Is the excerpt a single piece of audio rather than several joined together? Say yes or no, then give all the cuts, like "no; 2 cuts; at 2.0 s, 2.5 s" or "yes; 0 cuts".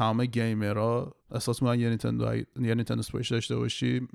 no; 1 cut; at 1.2 s